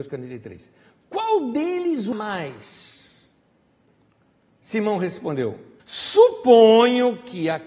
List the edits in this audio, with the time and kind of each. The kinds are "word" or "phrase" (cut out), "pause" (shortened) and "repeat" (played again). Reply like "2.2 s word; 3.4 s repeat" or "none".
2.1 s word; 5.8 s pause